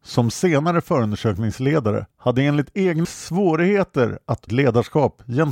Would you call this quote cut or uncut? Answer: cut